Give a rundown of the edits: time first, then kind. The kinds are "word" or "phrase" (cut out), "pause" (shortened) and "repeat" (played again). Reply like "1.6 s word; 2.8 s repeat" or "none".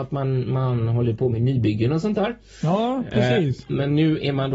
none